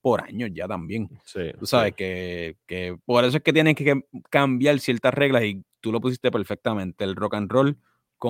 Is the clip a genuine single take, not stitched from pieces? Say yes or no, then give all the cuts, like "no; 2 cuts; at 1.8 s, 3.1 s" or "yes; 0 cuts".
no; 1 cut; at 3.0 s